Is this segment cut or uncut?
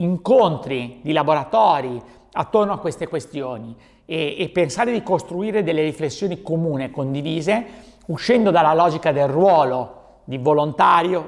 uncut